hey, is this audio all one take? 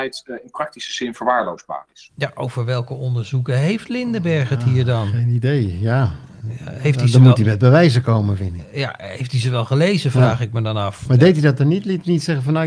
yes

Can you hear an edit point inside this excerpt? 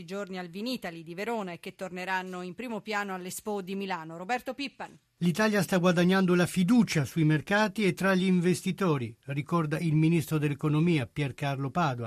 no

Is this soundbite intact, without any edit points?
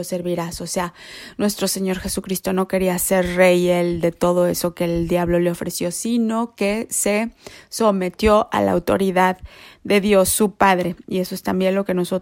yes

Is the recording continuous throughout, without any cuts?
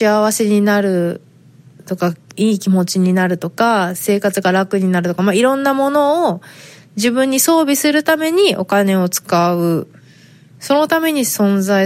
yes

